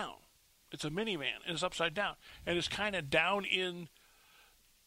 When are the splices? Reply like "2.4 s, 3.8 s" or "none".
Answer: none